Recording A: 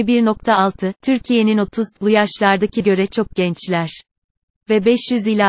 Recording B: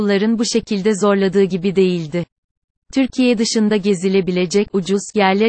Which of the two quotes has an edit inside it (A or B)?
A